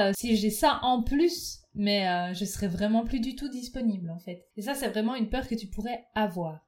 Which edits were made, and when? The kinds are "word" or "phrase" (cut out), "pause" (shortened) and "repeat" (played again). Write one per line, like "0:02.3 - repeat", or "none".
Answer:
0:04.5 - pause